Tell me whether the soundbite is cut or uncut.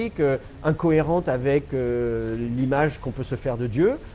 uncut